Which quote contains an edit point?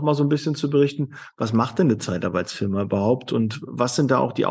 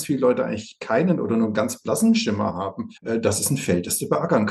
second; 1 cut; at 3.0 s

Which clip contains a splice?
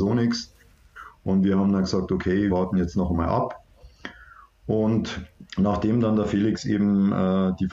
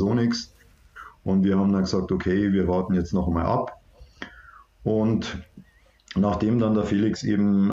first; 2 cuts; at 2.5 s, 5.5 s

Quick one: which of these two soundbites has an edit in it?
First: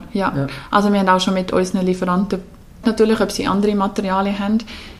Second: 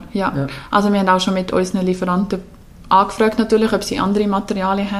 first; 1 cut; at 2.8 s

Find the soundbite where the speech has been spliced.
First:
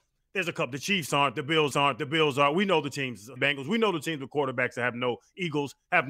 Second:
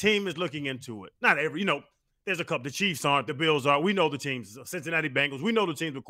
first; 2 cuts; at 1.7 s, 3.4 s

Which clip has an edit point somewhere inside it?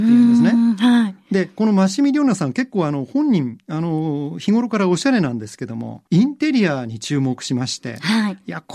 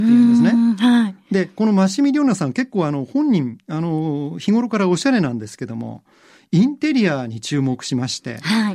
first; 1 cut; at 6.1 s

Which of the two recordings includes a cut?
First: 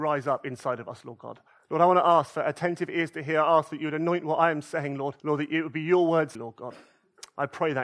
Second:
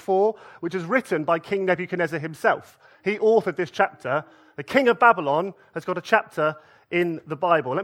first; 3 cuts; at 1.5 s, 5.2 s, 6.3 s

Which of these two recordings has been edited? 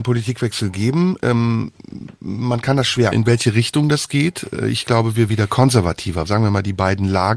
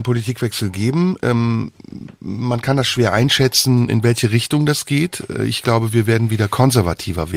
first; 3 cuts; at 3.1 s, 5.3 s, 6.3 s

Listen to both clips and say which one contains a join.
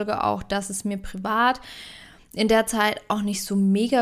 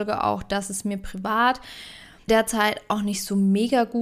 second; 1 cut; at 2.3 s

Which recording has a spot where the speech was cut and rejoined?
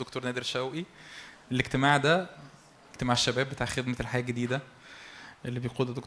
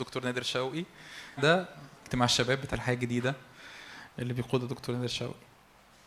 second; 3 cuts; at 1.4 s, 1.9 s, 2.7 s

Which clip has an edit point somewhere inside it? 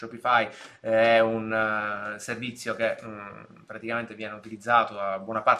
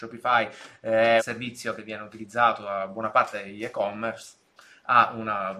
second; 3 cuts; at 1.2 s, 1.8 s, 4.6 s

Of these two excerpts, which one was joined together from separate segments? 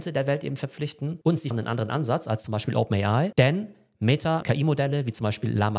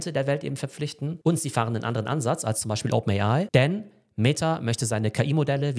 first; 2 cuts; at 1.5 s, 4.4 s

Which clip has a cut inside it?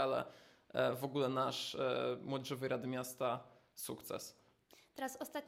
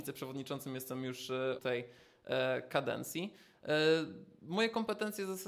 second; 1 cut; at 1.6 s

